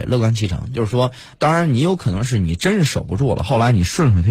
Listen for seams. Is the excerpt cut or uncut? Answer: cut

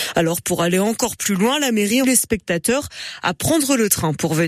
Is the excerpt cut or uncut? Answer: cut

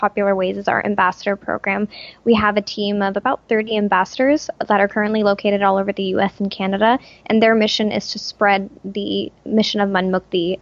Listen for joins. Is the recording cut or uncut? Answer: uncut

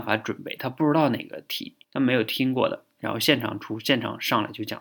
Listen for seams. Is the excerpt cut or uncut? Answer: cut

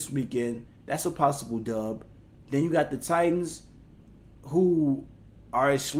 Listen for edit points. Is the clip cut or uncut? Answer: uncut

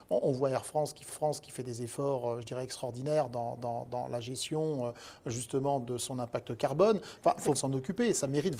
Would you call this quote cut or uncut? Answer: cut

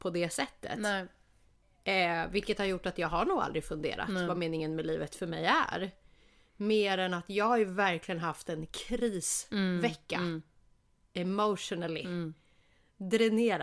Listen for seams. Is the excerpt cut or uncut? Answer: uncut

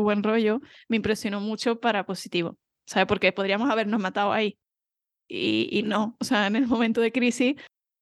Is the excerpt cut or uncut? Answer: uncut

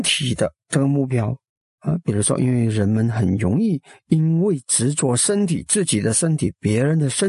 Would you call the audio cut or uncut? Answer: uncut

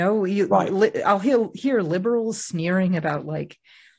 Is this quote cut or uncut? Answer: uncut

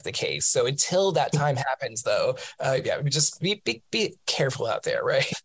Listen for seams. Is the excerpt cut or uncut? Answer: uncut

